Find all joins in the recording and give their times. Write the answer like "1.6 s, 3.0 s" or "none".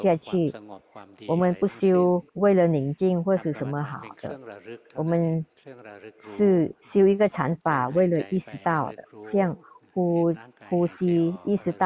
2.3 s